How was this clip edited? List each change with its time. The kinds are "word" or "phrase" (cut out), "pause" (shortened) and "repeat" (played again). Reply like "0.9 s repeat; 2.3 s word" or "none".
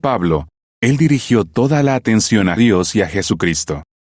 2.6 s word